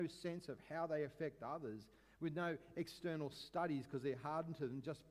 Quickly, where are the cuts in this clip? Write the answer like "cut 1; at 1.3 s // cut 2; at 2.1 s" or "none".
none